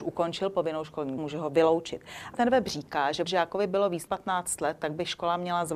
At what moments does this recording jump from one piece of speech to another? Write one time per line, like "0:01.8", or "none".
0:01.2
0:02.3
0:03.3
0:04.1